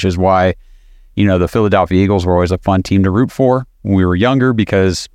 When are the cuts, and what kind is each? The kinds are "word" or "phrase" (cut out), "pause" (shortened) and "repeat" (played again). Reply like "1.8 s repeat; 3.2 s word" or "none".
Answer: none